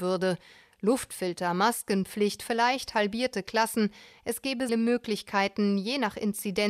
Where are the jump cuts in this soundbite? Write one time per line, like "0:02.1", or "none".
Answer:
0:04.7